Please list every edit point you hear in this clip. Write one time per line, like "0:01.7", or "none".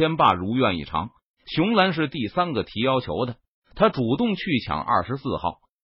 none